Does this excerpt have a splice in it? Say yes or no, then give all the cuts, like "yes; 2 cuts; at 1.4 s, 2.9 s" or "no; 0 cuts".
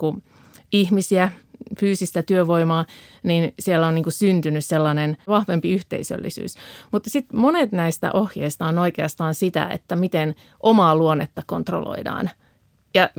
no; 0 cuts